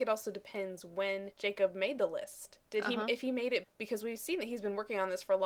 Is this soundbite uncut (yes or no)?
no